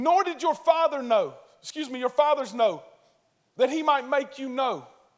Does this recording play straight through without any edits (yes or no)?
yes